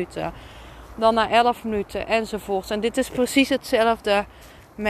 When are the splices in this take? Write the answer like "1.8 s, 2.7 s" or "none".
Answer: none